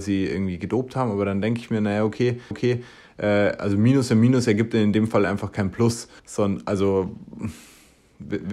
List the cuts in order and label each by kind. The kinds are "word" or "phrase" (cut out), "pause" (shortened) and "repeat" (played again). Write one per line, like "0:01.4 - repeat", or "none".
0:02.5 - repeat
0:06.2 - pause